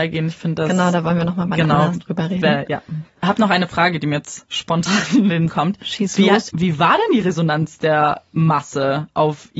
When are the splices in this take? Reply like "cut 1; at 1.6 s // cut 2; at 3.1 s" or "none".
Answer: cut 1; at 5.5 s